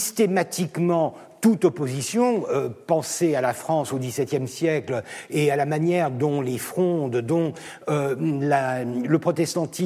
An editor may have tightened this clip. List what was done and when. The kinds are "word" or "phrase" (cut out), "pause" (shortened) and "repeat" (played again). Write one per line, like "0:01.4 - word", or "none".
none